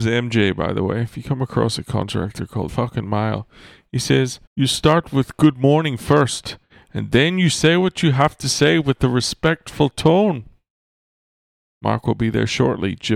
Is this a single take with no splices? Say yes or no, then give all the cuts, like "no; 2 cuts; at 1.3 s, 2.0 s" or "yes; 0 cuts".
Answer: no; 2 cuts; at 2.7 s, 4.5 s